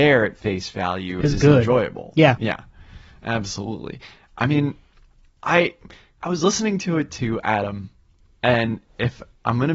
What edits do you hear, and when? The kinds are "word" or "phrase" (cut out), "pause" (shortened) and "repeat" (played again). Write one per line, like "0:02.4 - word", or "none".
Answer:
0:06.2 - word